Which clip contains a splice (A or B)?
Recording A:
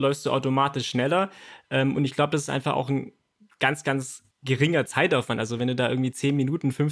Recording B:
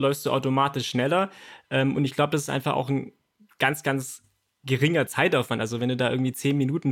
A